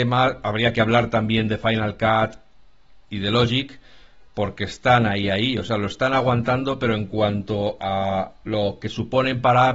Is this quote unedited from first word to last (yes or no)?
yes